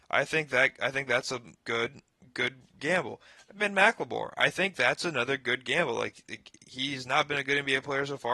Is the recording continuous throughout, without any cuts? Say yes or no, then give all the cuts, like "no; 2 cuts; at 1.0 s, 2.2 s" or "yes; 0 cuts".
no; 1 cut; at 1.6 s